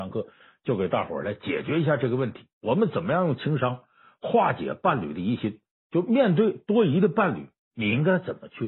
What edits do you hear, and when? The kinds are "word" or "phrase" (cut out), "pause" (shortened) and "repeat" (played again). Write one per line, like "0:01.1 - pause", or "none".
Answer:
none